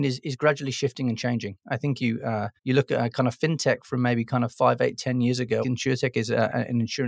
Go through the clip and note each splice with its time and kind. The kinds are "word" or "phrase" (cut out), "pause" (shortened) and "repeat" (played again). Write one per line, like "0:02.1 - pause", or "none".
0:02.0 - word
0:02.6 - pause
0:05.6 - phrase